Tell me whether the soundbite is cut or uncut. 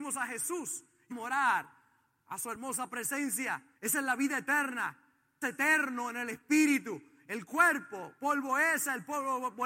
cut